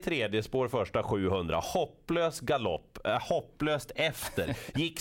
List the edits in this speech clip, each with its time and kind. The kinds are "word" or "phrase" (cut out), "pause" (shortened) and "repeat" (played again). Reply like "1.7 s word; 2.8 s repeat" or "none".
none